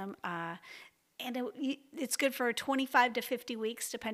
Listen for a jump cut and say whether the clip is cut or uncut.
uncut